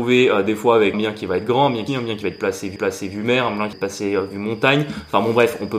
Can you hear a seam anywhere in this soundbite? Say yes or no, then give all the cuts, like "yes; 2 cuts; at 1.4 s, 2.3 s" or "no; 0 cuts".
yes; 4 cuts; at 0.9 s, 1.9 s, 2.8 s, 3.7 s